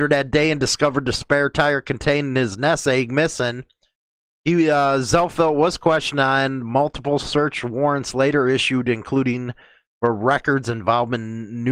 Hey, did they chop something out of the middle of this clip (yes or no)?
no